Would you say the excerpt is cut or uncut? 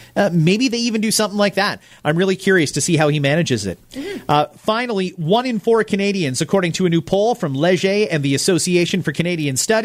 uncut